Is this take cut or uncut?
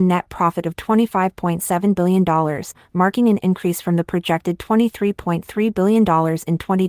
uncut